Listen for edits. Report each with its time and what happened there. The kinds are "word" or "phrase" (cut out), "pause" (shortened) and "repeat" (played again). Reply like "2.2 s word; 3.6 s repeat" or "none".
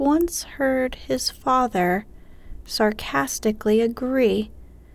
none